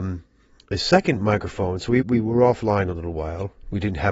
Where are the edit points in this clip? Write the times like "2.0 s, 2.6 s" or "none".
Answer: 2.0 s